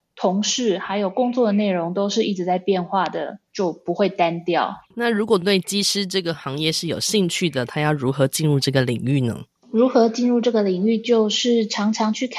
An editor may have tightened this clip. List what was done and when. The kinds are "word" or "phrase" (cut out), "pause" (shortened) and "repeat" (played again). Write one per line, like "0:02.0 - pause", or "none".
0:03.5 - pause
0:04.8 - pause